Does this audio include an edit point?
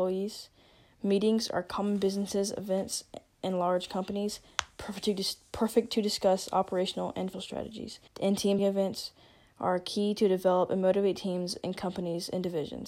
yes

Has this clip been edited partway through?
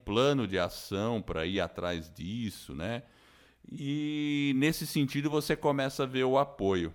no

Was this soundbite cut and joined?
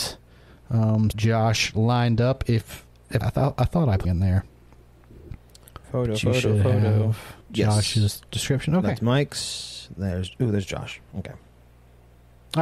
yes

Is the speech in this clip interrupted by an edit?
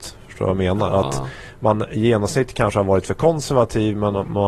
no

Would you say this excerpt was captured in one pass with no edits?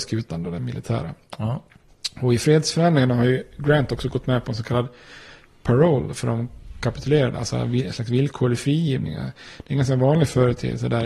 yes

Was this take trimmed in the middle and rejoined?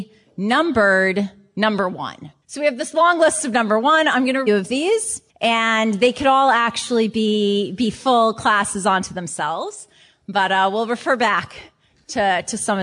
yes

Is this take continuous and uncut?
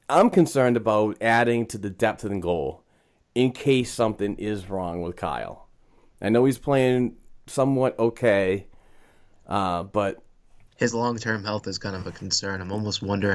yes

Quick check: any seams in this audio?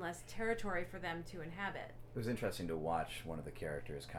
no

